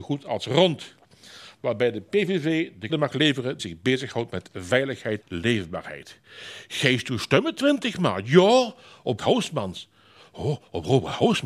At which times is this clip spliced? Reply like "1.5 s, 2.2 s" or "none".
2.9 s, 3.6 s, 5.2 s, 9.2 s